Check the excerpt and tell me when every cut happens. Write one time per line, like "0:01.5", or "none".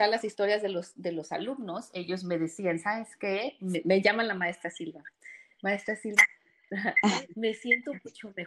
none